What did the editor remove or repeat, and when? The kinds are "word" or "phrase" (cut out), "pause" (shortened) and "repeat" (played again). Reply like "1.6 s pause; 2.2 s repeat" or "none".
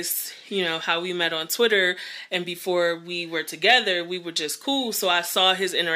none